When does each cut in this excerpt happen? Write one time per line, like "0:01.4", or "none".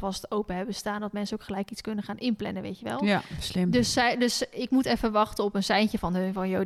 none